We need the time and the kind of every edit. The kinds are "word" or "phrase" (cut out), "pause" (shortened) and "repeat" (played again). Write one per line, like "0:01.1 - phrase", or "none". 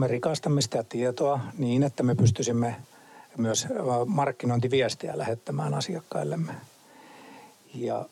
none

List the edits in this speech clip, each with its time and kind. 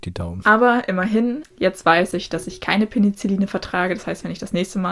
none

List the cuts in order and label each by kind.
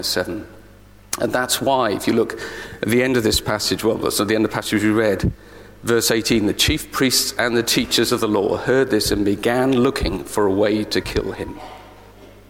none

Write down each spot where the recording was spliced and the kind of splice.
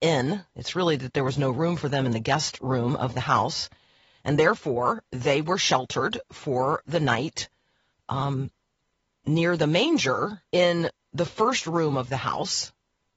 0:10.5 - pause

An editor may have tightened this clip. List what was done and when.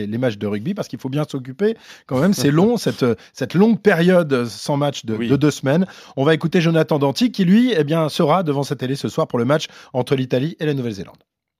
none

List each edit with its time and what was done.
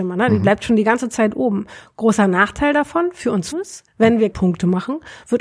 0:03.5 - word
0:04.3 - word

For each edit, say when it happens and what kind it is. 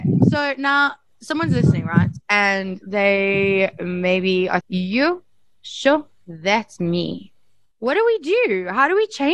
0:04.6 - word

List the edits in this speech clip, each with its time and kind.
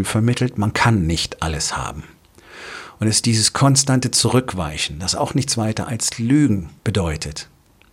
0:06.8 - pause

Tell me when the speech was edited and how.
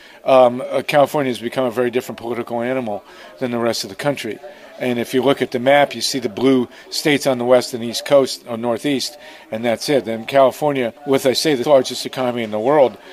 0:11.0 - pause
0:11.6 - word

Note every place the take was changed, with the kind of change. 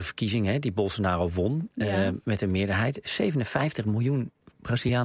none

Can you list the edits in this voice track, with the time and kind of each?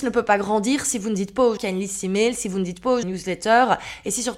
0:01.6 - word
0:03.0 - phrase

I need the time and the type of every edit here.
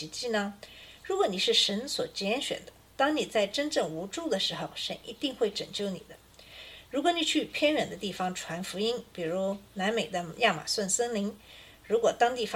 0:02.8 - pause

